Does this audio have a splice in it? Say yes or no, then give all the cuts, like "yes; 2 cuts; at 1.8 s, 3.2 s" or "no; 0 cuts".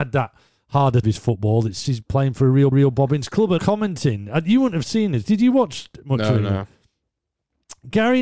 yes; 4 cuts; at 1.0 s, 1.8 s, 2.7 s, 3.6 s